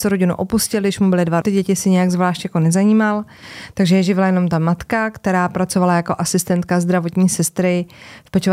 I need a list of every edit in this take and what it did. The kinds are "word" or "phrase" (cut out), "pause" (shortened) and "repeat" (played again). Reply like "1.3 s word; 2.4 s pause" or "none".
1.4 s phrase